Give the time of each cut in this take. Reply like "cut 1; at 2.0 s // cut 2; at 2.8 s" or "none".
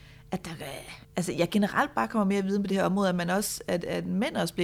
cut 1; at 1.0 s